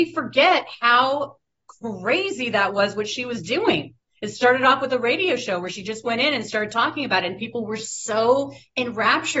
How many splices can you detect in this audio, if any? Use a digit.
0